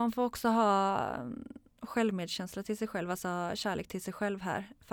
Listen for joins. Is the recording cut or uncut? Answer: uncut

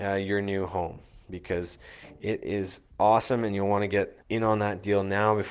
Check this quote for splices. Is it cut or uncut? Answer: cut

